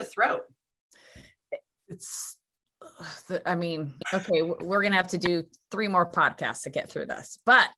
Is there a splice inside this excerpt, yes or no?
no